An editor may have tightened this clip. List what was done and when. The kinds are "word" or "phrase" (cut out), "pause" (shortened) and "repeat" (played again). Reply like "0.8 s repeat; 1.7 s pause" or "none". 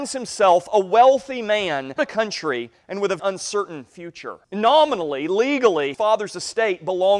2.0 s word; 3.2 s word; 4.4 s pause; 5.9 s word